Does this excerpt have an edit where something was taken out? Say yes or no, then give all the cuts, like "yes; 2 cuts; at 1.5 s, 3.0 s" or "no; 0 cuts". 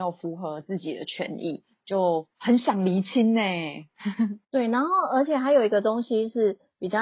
yes; 2 cuts; at 2.3 s, 4.4 s